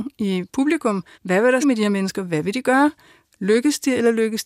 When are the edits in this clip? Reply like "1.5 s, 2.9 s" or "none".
1.1 s, 1.6 s